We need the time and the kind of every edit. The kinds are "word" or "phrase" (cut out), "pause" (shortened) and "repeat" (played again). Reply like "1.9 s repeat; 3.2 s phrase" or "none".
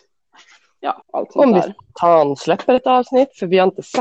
1.0 s pause